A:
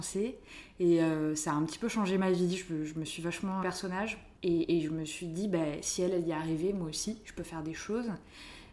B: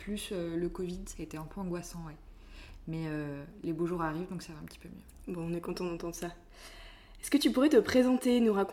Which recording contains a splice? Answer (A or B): A